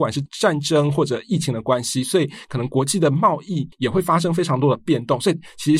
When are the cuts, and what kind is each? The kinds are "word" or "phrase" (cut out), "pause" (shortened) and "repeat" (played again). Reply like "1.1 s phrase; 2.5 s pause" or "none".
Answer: 3.7 s pause

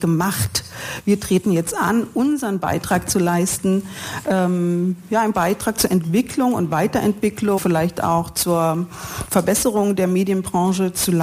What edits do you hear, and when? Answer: 5.3 s word; 7.6 s word

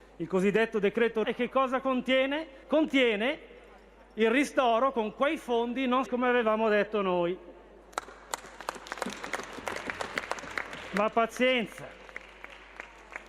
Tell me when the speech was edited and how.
1.2 s word; 2.6 s pause; 6.1 s word

